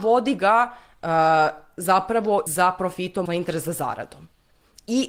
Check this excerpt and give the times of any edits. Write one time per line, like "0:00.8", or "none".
0:02.5
0:03.3